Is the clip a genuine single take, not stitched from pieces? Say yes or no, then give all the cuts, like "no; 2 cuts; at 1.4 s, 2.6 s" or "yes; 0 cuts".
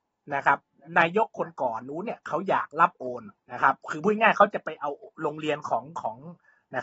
no; 1 cut; at 3.4 s